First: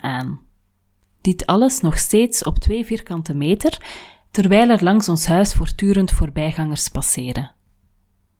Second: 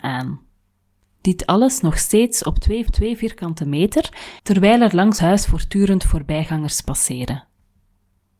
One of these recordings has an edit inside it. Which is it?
second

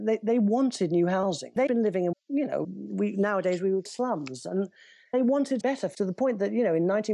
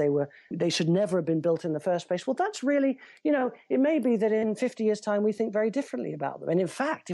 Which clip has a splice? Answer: first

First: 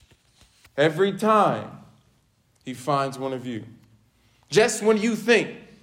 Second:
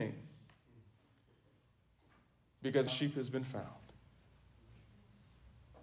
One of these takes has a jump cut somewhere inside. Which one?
second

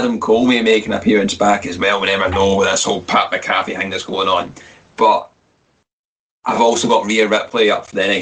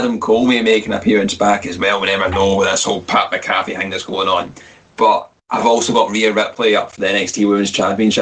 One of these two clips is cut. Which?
second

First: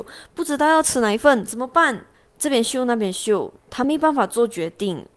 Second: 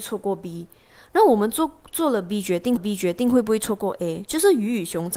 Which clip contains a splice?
second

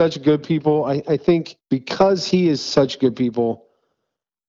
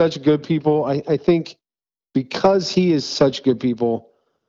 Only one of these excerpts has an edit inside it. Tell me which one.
first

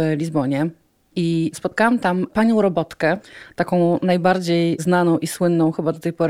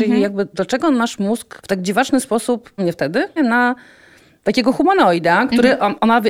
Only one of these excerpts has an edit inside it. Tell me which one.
second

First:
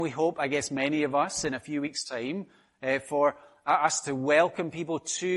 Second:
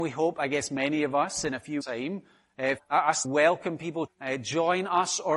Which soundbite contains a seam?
second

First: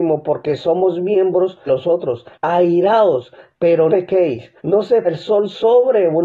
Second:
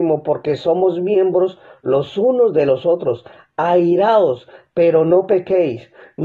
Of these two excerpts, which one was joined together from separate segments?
first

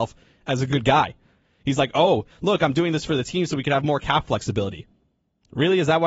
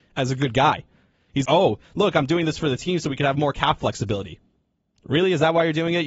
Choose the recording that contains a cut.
second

